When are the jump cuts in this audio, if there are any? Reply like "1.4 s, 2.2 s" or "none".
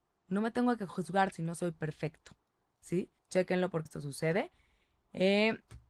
1.3 s, 3.2 s, 3.9 s